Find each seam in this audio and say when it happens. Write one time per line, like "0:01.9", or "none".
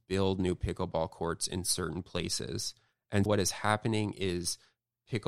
0:03.3